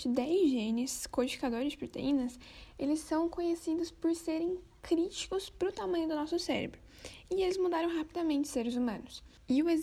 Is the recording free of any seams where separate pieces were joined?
yes; 0 cuts

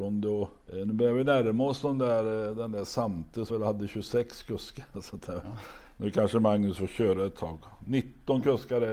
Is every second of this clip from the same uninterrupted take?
no; 1 cut; at 3.5 s

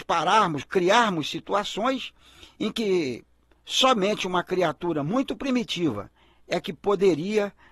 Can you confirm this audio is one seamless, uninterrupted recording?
yes; 0 cuts

